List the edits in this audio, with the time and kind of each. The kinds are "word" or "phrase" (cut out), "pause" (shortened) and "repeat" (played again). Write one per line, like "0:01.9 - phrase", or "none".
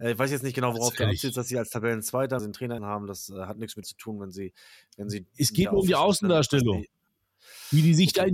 0:02.4 - word
0:02.8 - word
0:03.8 - word